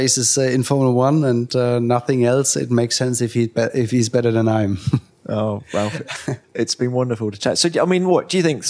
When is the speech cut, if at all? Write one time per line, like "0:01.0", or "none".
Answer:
0:06.4